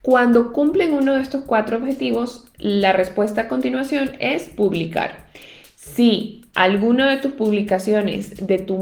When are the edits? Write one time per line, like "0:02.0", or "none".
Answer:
none